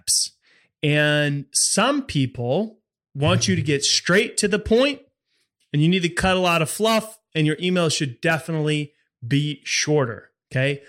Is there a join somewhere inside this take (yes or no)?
no